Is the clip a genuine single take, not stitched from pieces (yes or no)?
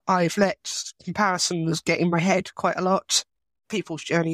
yes